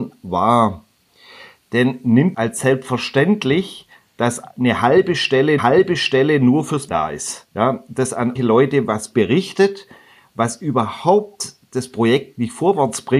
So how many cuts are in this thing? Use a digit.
5